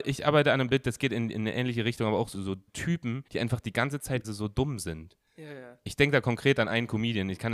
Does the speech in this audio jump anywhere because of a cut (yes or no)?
yes